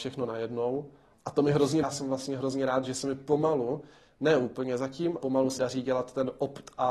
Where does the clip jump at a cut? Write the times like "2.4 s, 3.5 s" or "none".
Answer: 1.1 s, 1.8 s, 5.2 s, 5.6 s